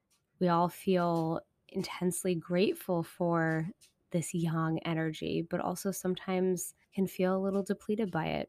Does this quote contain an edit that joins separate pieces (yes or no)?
yes